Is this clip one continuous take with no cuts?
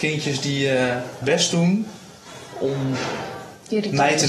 no; 1 cut; at 1.2 s

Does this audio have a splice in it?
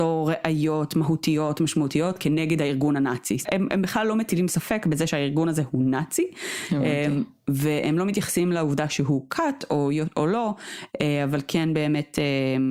yes; 1 cut; at 3.5 s

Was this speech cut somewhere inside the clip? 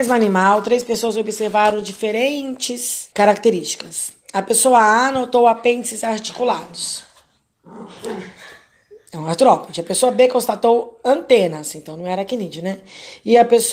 yes; 1 cut; at 3.1 s

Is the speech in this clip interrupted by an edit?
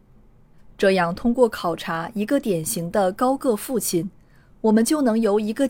no; 0 cuts

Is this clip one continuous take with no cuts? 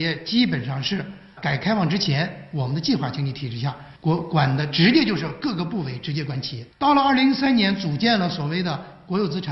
no; 3 cuts; at 1.4 s, 4.0 s, 6.7 s

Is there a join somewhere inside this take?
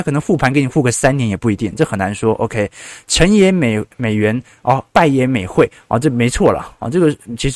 yes; 1 cut; at 4.9 s

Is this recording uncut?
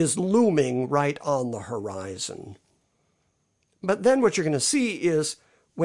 yes; 0 cuts

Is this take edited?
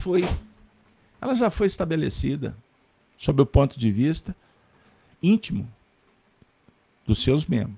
no; 0 cuts

